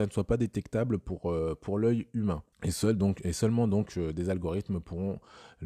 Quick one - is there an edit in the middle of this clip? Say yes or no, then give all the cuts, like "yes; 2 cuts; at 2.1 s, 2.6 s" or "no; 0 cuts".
yes; 1 cut; at 2.5 s